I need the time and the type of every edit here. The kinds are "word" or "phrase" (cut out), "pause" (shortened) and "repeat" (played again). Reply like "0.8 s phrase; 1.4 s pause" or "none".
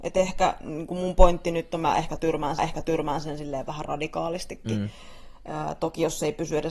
2.6 s repeat